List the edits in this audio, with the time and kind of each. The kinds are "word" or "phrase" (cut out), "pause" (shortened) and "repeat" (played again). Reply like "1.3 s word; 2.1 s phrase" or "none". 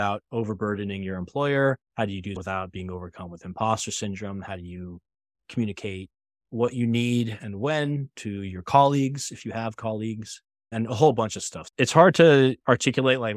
1.9 s pause; 2.4 s word